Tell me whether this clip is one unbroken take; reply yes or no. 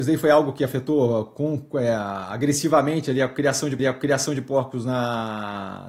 no